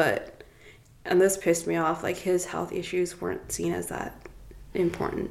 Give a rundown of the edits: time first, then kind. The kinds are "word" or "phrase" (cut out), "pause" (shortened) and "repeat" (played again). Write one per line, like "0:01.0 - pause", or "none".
none